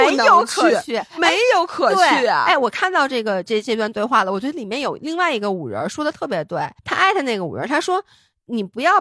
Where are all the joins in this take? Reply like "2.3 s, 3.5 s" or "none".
6.8 s